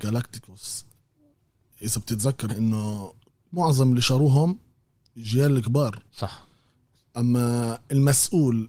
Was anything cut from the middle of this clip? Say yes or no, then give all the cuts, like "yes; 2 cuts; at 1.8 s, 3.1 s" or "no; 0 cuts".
yes; 3 cuts; at 1.8 s, 2.5 s, 6.1 s